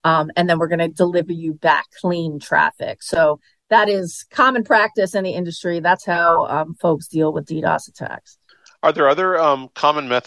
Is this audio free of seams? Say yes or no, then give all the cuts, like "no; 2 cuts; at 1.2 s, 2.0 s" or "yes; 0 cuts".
yes; 0 cuts